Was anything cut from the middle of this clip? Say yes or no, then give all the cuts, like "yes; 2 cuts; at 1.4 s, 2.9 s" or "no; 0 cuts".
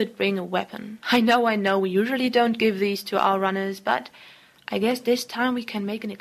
yes; 1 cut; at 1.0 s